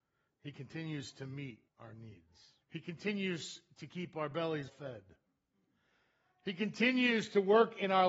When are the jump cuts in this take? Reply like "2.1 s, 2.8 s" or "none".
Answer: 1.7 s, 2.6 s, 4.7 s